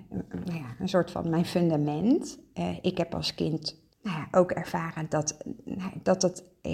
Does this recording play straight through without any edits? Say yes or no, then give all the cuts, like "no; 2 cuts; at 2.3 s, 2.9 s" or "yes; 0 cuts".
no; 1 cut; at 3.9 s